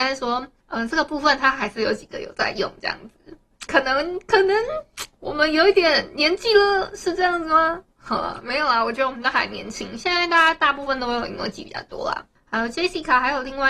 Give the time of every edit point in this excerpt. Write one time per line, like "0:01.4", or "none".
0:03.7